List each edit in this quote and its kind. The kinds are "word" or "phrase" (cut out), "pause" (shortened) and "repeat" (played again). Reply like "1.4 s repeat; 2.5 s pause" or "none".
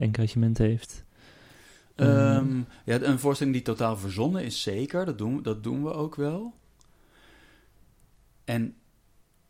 none

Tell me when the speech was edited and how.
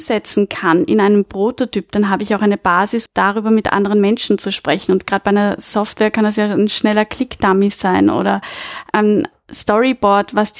3.1 s word; 8.9 s word

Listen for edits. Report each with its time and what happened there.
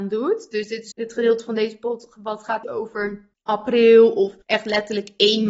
0.9 s phrase; 2.6 s word; 3.3 s pause; 4.4 s pause

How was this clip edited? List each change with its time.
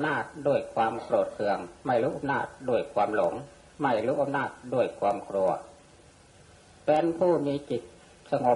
none

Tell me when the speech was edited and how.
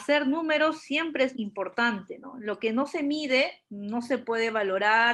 1.3 s word

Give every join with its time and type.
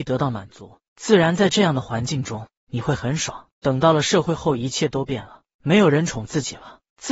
3.5 s pause

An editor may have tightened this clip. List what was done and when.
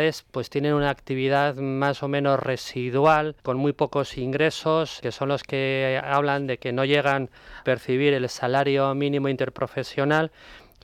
3.4 s pause; 5.0 s word; 7.6 s word

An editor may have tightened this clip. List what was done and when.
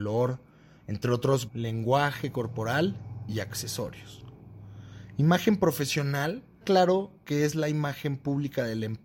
1.5 s word; 6.6 s word

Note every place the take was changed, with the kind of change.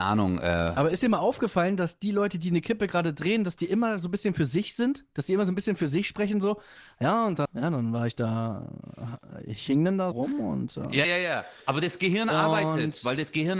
1.0 s phrase; 7.4 s word; 10.1 s word; 11.0 s word

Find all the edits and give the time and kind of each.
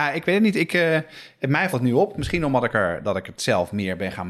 1.7 s word

